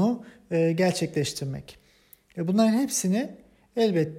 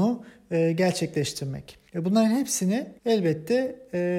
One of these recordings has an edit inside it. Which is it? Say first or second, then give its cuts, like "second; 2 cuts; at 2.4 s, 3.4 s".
second; 2 cuts; at 1.9 s, 3.0 s